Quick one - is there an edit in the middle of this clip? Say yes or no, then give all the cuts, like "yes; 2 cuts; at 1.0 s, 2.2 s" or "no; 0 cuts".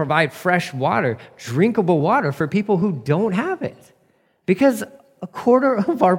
no; 0 cuts